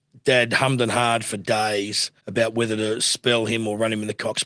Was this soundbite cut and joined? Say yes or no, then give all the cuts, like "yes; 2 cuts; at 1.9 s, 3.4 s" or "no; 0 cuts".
yes; 1 cut; at 2.2 s